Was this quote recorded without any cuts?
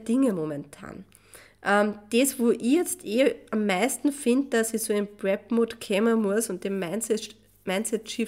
yes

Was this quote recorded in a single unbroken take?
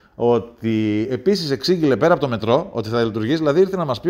yes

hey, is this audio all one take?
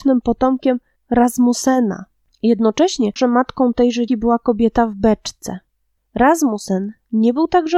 no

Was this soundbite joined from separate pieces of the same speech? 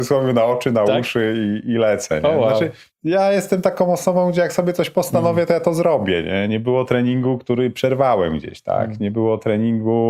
no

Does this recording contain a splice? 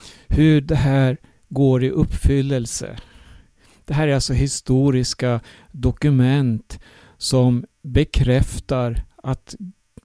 no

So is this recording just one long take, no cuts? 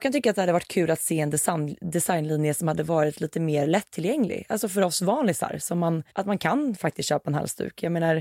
no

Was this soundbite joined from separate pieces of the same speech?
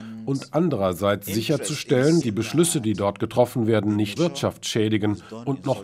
yes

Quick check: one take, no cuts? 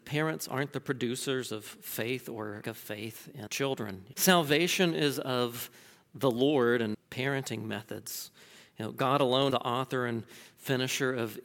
no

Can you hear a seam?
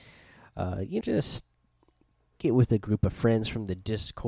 yes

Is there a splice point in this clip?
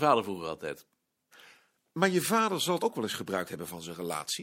yes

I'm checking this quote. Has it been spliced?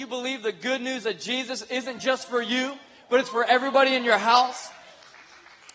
no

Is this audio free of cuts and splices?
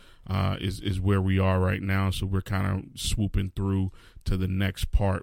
yes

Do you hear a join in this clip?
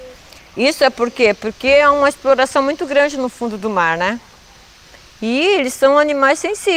no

